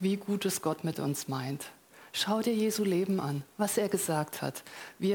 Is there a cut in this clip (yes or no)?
no